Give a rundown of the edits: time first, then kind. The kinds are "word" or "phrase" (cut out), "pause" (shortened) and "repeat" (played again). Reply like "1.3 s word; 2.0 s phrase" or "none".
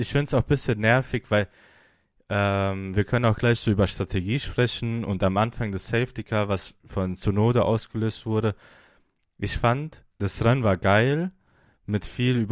10.1 s word